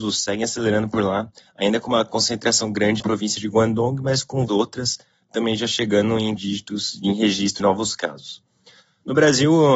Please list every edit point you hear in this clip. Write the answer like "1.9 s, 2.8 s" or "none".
3.0 s, 4.5 s, 6.4 s, 7.6 s